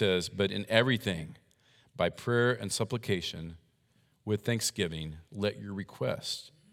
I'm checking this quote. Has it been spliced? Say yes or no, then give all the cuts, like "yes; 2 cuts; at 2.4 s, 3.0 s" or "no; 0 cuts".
no; 0 cuts